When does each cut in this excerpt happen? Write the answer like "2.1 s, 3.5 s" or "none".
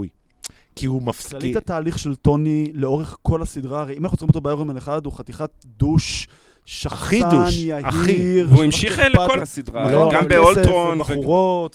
9.4 s